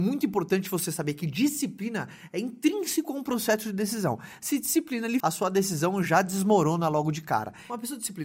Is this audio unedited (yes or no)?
no